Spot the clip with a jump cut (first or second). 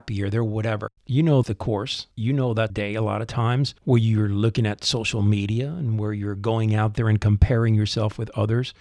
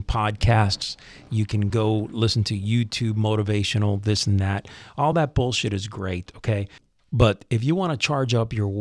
first